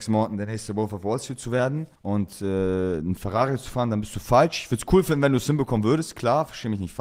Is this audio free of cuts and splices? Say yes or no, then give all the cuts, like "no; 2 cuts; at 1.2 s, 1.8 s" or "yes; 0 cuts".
no; 1 cut; at 1.9 s